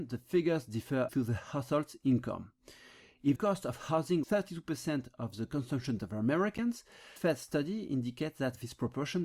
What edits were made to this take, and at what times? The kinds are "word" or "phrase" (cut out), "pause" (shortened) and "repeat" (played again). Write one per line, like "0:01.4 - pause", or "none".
0:01.1 - word
0:03.4 - word
0:04.2 - word
0:06.0 - word
0:07.2 - phrase